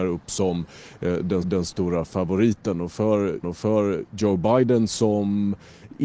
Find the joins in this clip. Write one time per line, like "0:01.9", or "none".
0:01.4
0:03.4